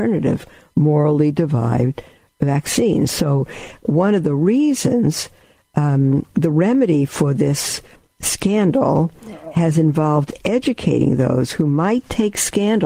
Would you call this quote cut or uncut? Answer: uncut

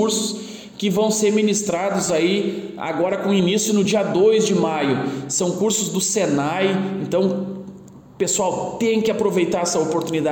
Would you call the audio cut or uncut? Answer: uncut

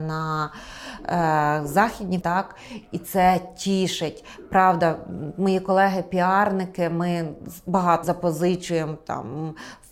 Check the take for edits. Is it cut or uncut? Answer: cut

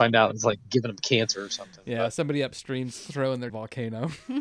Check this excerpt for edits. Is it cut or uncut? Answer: cut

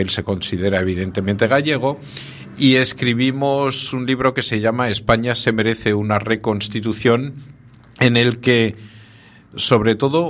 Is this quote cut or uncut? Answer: cut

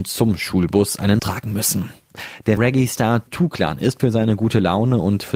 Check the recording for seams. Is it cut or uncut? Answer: cut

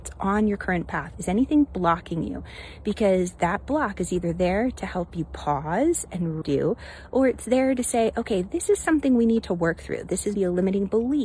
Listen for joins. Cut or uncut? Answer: cut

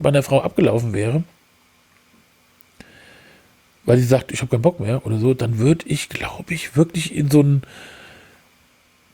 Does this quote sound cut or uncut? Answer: uncut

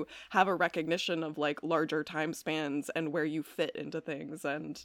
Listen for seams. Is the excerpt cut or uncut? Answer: uncut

